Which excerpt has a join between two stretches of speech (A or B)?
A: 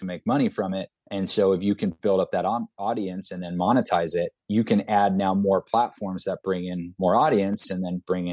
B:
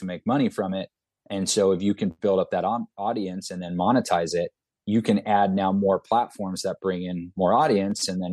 A